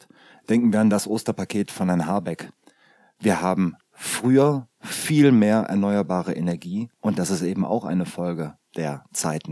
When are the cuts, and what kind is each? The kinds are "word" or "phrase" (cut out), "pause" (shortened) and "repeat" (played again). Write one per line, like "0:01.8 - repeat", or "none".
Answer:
none